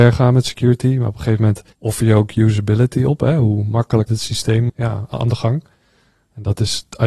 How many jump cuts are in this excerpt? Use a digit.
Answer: 3